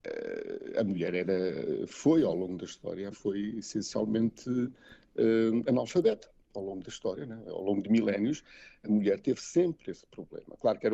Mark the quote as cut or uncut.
cut